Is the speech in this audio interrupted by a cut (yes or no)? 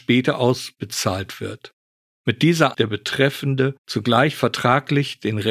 yes